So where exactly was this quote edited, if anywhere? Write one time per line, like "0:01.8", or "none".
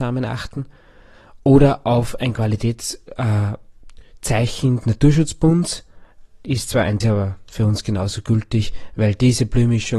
0:04.8
0:07.0